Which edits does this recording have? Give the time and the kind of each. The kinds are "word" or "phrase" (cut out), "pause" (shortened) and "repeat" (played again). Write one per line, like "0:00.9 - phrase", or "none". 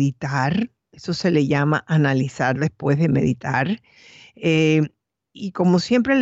none